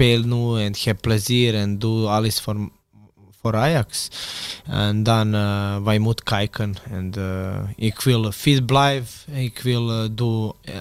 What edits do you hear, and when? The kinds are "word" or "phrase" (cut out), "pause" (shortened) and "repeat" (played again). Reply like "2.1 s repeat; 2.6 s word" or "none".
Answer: none